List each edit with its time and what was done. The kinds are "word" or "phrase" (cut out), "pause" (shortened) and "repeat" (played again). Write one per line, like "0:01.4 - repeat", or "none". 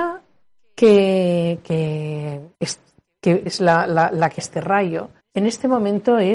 0:02.5 - pause
0:03.5 - word
0:04.4 - word
0:05.2 - pause